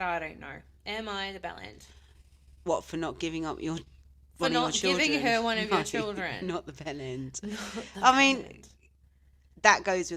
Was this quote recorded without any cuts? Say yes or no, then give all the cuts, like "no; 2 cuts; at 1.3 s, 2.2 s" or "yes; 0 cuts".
yes; 0 cuts